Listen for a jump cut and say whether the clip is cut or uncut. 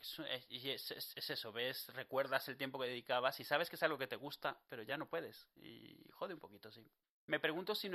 uncut